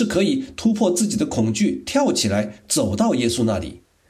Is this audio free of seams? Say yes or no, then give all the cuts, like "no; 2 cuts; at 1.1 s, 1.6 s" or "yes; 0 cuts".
yes; 0 cuts